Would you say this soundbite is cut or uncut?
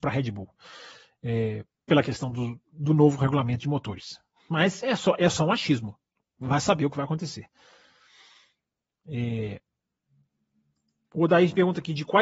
uncut